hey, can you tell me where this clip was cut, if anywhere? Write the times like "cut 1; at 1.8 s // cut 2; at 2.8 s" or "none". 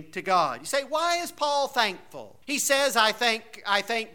cut 1; at 2.4 s